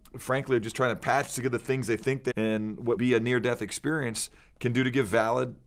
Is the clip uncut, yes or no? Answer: no